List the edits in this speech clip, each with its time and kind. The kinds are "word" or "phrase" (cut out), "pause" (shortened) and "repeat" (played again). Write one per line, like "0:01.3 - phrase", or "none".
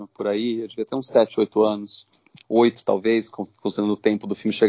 none